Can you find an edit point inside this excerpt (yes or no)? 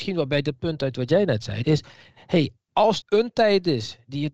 yes